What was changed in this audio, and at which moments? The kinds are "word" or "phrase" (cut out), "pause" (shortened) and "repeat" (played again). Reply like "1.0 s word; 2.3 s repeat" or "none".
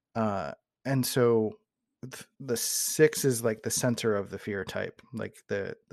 2.3 s pause